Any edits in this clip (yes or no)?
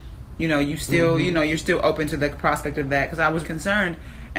yes